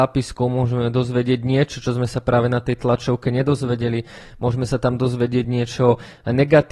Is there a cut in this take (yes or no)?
no